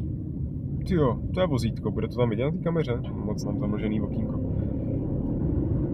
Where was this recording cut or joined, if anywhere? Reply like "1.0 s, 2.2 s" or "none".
3.4 s